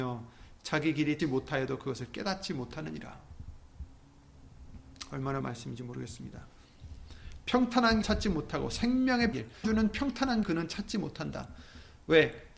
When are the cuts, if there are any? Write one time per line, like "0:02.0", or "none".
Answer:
0:01.2
0:05.4
0:08.0
0:09.3
0:09.6
0:10.4